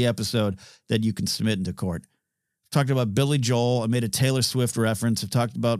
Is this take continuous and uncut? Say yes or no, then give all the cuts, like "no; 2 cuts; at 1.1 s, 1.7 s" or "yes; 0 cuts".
yes; 0 cuts